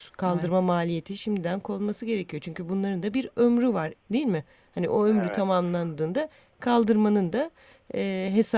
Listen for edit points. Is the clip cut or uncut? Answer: cut